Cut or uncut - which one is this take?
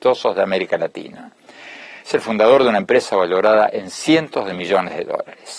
uncut